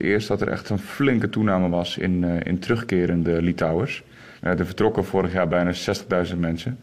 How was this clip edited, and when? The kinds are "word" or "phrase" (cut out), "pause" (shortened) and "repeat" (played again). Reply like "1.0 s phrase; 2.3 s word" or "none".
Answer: 4.4 s pause